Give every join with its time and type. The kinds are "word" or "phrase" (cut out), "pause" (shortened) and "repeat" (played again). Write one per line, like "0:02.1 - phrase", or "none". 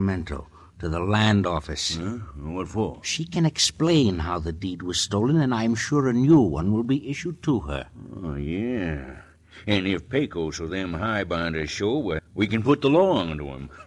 0:12.2 - word